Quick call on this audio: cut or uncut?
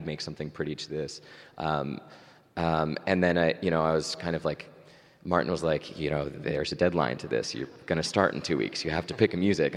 uncut